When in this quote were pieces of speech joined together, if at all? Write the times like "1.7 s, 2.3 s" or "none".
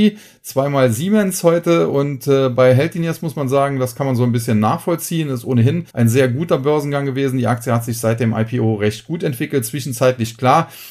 5.9 s